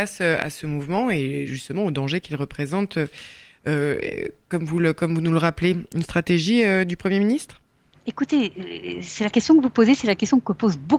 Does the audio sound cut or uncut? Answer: uncut